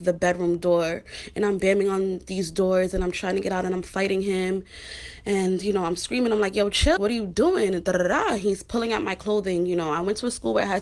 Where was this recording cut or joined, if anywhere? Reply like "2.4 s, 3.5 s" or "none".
7.0 s